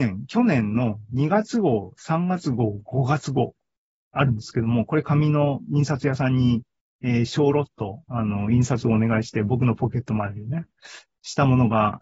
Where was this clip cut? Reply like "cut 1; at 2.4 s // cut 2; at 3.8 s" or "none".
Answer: none